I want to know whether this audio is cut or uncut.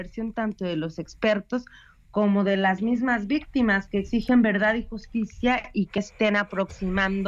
cut